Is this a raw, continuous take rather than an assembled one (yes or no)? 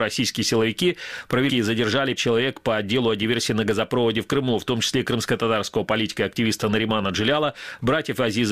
no